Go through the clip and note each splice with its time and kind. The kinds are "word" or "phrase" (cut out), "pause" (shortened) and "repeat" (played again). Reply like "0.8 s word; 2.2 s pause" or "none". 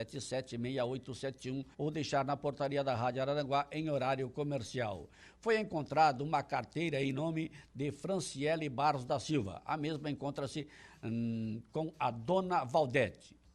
1.7 s pause